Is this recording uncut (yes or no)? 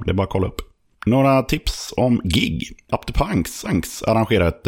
no